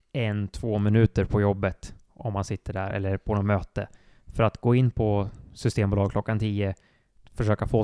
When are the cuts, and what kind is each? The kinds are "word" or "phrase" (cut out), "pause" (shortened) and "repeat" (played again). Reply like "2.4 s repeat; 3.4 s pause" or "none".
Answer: none

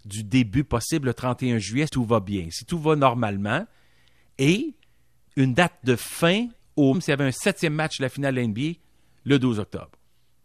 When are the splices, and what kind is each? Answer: 1.9 s word; 6.9 s word

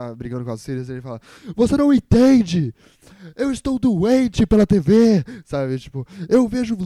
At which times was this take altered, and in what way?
none

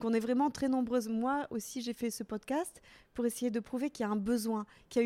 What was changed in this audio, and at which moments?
none

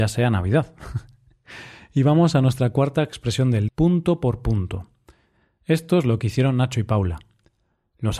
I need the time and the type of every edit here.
3.7 s word

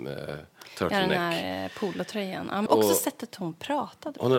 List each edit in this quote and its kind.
2.7 s phrase

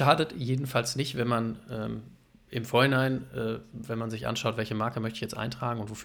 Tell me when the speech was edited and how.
none

